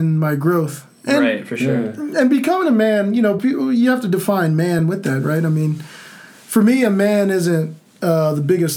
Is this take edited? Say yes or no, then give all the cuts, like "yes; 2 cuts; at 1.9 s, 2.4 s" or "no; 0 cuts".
no; 0 cuts